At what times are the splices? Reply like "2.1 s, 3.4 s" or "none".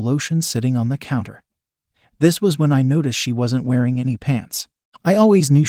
none